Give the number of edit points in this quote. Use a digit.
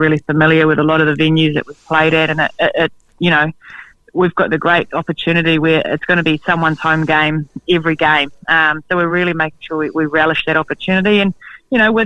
0